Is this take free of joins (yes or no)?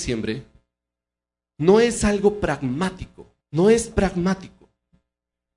no